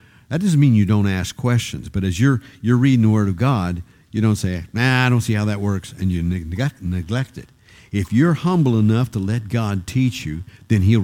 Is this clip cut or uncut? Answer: uncut